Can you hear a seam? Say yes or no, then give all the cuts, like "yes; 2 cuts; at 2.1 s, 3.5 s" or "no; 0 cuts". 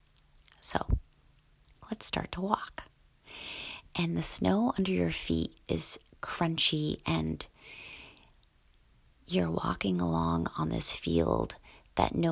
no; 0 cuts